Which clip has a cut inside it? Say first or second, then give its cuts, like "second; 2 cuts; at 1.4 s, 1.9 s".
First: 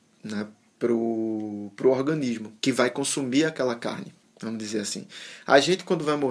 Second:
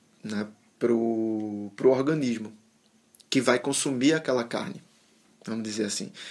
first; 2 cuts; at 2.6 s, 4.2 s